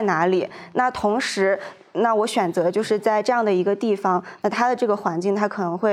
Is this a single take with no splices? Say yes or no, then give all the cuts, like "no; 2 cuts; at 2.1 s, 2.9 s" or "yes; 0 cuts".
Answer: yes; 0 cuts